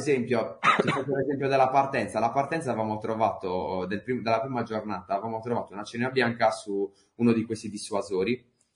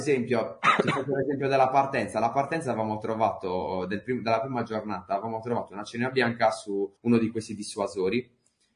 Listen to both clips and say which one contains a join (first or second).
second